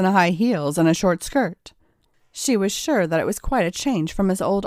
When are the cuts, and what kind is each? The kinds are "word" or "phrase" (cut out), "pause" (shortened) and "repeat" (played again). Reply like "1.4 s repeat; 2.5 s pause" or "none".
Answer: none